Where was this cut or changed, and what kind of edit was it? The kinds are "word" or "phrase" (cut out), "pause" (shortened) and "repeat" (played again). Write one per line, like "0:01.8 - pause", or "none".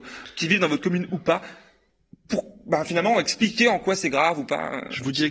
none